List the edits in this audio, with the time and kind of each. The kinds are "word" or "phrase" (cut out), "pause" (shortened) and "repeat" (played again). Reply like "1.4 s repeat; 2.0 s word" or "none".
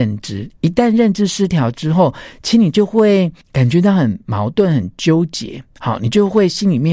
3.4 s pause